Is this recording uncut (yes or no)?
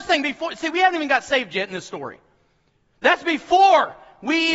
yes